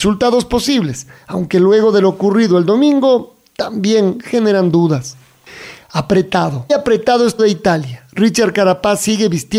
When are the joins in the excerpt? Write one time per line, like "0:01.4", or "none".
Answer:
0:06.7
0:07.4